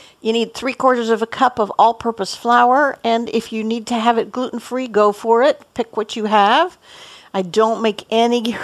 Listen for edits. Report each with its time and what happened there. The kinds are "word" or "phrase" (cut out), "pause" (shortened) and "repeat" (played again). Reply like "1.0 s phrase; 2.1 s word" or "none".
none